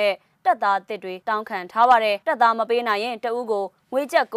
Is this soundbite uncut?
no; 2 cuts; at 1.2 s, 2.2 s

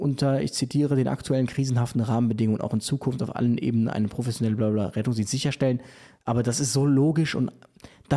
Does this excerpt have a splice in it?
no; 0 cuts

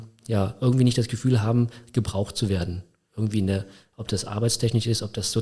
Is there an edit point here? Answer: no; 0 cuts

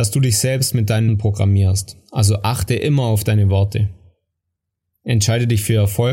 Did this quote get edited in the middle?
yes; 1 cut; at 1.1 s

